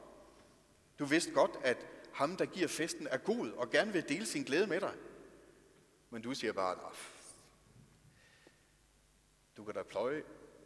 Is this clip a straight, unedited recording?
yes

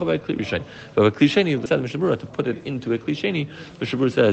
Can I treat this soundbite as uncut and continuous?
no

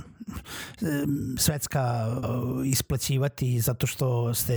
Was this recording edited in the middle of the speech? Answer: yes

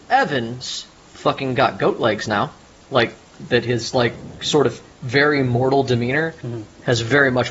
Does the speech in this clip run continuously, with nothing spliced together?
yes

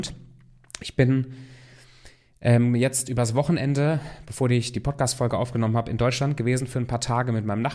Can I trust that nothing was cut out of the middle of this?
yes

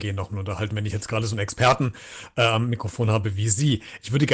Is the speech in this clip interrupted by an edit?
no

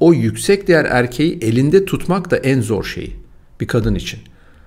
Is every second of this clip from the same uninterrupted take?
yes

